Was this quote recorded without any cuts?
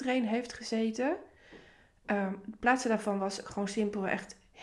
yes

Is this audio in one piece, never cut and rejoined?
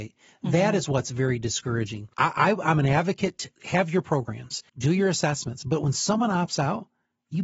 no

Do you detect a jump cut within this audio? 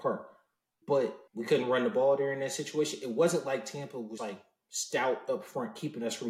yes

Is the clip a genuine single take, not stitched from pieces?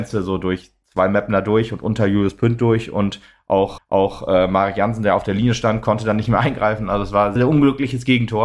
no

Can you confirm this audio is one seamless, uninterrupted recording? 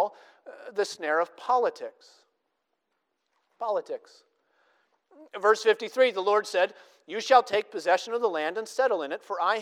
yes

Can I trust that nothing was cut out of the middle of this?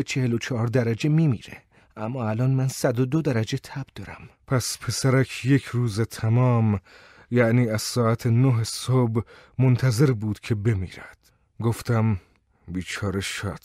yes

